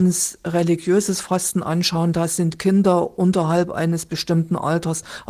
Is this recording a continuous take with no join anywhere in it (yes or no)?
yes